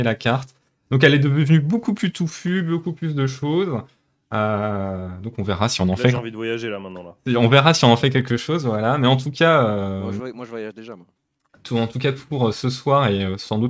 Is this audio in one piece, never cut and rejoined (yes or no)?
yes